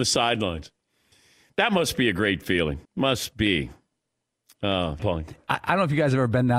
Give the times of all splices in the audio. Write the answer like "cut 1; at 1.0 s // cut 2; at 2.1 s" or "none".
cut 1; at 2.8 s // cut 2; at 5.0 s